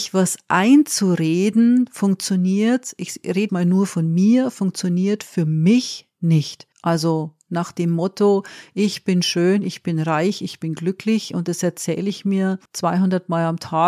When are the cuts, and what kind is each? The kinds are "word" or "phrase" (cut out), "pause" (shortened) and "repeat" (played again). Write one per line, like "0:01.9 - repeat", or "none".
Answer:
0:03.5 - word
0:06.7 - pause
0:12.7 - pause